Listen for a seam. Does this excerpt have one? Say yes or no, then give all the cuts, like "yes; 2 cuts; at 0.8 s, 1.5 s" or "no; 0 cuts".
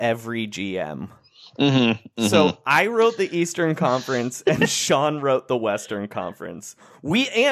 no; 0 cuts